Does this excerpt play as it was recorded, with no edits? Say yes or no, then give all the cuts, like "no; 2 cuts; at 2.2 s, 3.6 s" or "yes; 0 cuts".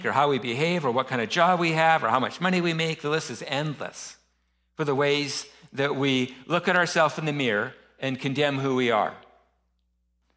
yes; 0 cuts